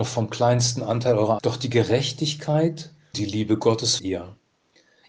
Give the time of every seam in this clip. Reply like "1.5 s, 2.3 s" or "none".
1.4 s, 3.1 s, 4.0 s